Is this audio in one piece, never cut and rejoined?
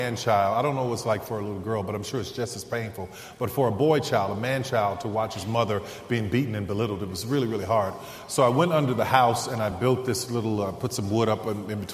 yes; 0 cuts

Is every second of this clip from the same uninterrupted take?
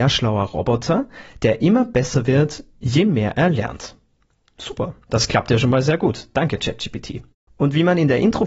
yes; 0 cuts

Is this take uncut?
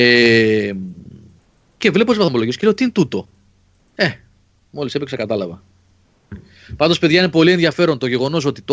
yes; 0 cuts

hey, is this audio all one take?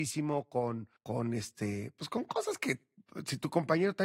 no; 1 cut; at 1.0 s

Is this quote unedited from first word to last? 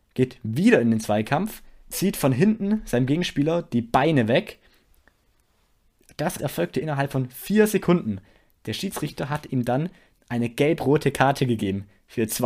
no; 2 cuts; at 1.8 s, 6.4 s

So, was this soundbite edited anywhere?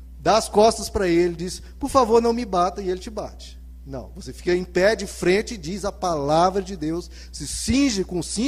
no; 0 cuts

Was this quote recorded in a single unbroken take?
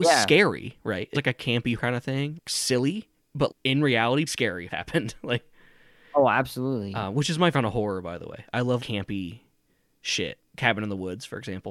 no; 9 cuts; at 1.1 s, 1.8 s, 2.4 s, 3.5 s, 4.3 s, 4.7 s, 7.5 s, 8.8 s, 10.4 s

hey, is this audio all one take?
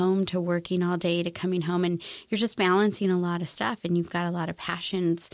yes; 0 cuts

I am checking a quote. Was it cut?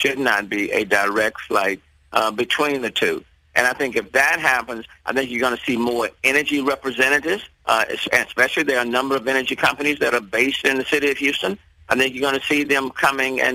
yes; 1 cut; at 7.5 s

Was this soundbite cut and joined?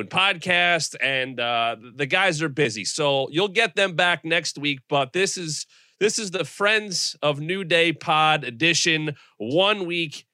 no; 0 cuts

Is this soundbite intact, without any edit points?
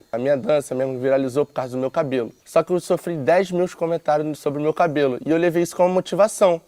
no; 1 cut; at 2.4 s

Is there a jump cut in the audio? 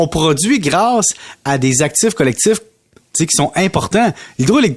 no; 0 cuts

